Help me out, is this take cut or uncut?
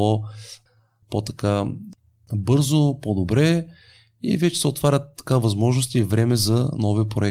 uncut